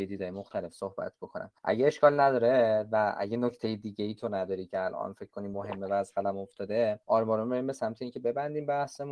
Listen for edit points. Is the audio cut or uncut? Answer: cut